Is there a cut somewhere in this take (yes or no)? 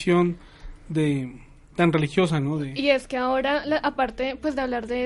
no